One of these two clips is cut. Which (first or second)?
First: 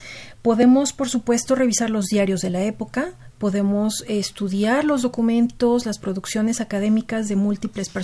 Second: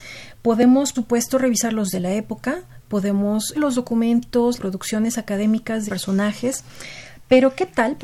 second